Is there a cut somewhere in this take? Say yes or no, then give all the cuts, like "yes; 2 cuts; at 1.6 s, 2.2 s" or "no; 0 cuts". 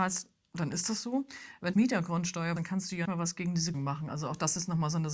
yes; 4 cuts; at 1.7 s, 2.6 s, 3.0 s, 3.7 s